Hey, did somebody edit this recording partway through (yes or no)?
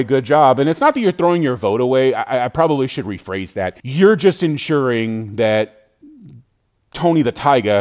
yes